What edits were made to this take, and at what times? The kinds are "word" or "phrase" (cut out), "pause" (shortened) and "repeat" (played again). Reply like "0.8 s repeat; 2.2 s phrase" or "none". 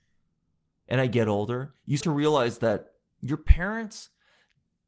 2.0 s word; 3.1 s pause